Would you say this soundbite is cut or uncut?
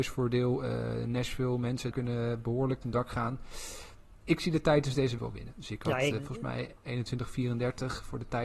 cut